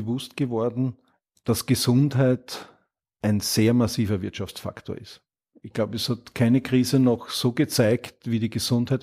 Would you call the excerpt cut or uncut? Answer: uncut